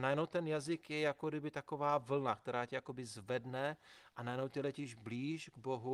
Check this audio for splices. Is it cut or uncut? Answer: uncut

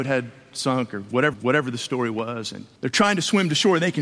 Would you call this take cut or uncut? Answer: cut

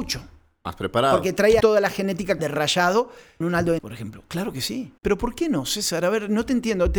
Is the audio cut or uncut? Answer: cut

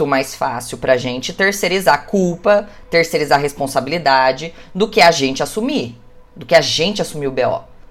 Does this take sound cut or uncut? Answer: uncut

